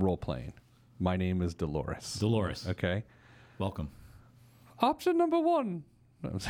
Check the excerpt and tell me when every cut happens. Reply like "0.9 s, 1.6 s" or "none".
none